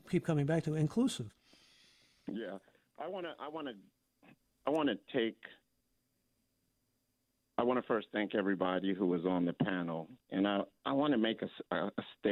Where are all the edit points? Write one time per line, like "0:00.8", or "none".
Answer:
none